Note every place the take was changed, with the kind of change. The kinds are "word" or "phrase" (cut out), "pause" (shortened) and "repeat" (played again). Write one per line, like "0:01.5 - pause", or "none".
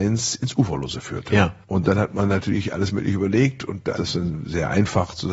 0:04.0 - word